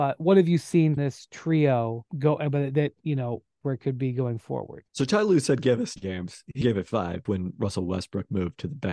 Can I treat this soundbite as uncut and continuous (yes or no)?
no